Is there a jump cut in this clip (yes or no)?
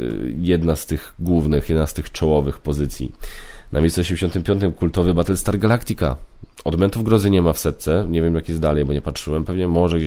no